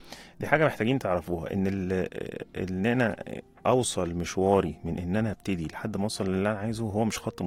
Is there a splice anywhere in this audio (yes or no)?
no